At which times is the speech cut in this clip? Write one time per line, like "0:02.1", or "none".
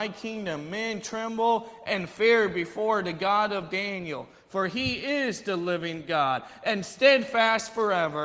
none